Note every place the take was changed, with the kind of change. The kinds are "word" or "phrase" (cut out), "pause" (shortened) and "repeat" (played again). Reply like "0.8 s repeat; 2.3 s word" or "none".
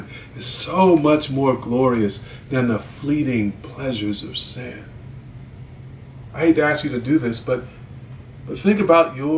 none